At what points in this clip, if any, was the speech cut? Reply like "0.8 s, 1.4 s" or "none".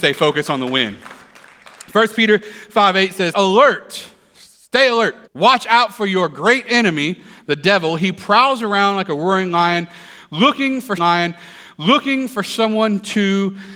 3.3 s, 5.3 s, 11.0 s

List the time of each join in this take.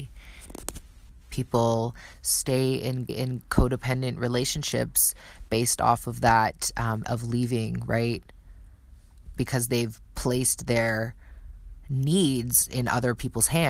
1.2 s, 3.1 s, 7.0 s, 9.4 s

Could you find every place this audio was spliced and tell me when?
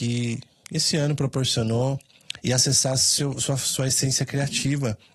none

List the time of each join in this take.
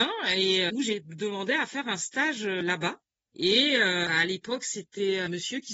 none

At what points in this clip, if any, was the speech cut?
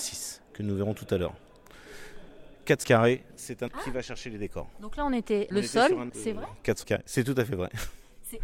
2.8 s, 3.7 s, 5.5 s, 6.1 s, 6.8 s

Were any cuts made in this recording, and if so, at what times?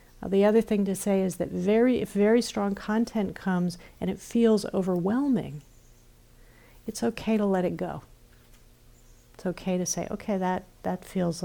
none

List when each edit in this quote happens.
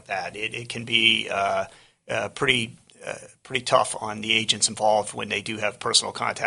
none

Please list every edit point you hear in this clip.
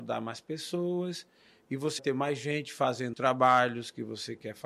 2.0 s, 3.1 s

